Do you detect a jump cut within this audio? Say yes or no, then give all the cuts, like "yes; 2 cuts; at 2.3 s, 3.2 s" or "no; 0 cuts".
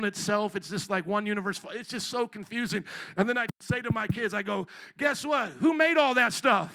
no; 0 cuts